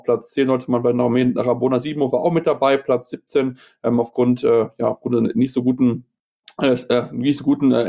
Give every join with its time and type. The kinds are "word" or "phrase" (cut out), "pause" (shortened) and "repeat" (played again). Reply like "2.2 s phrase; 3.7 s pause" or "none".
none